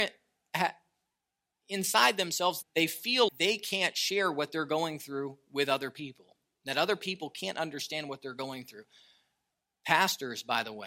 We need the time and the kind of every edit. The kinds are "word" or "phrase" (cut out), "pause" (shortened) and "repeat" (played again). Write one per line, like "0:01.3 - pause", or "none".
0:02.6 - word
0:03.3 - word